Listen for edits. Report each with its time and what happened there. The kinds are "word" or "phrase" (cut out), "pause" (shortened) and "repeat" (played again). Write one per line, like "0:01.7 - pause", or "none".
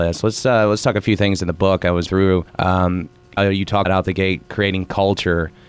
0:02.1 - word
0:02.5 - pause
0:03.4 - phrase
0:03.8 - word